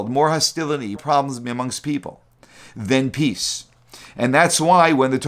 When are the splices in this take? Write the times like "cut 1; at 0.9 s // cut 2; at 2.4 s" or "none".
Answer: cut 1; at 1.0 s

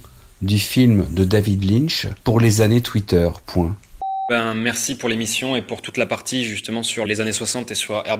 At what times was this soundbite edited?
cut 1; at 2.2 s // cut 2; at 7.0 s

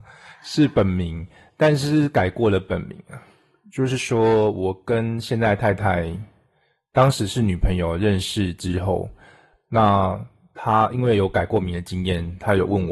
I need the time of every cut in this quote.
none

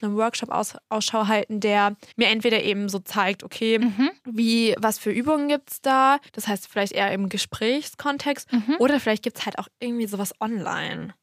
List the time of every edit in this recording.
cut 1; at 2.1 s // cut 2; at 4.2 s // cut 3; at 6.3 s

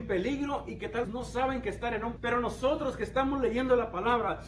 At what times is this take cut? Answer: cut 1; at 1.0 s // cut 2; at 2.2 s

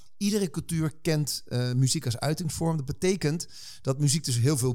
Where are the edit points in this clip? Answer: none

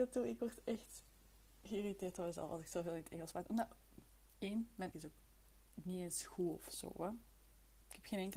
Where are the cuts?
cut 1; at 4.9 s

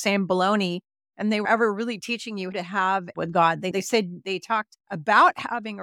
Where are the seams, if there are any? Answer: cut 1; at 1.4 s // cut 2; at 2.5 s // cut 3; at 3.1 s // cut 4; at 3.7 s // cut 5; at 4.2 s // cut 6; at 4.8 s

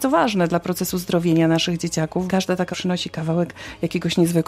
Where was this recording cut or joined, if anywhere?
cut 1; at 2.3 s // cut 2; at 2.7 s

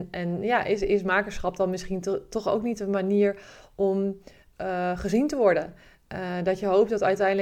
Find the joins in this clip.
none

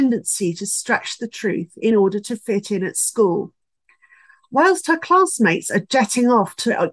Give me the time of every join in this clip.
none

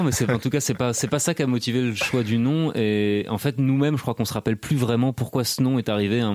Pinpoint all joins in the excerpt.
none

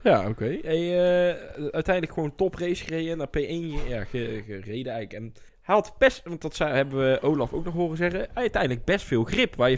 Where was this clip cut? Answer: cut 1; at 5.5 s

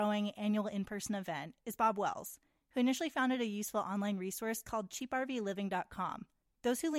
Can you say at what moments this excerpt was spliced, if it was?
none

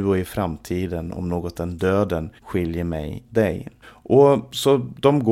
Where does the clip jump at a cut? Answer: cut 1; at 1.5 s // cut 2; at 2.4 s // cut 3; at 3.3 s // cut 4; at 3.8 s

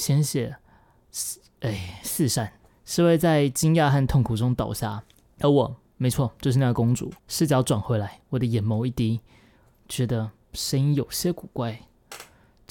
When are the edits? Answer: cut 1; at 2.6 s // cut 2; at 5.1 s // cut 3; at 7.2 s

